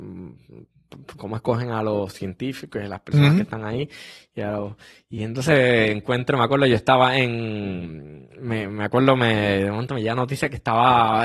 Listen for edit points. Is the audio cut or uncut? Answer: uncut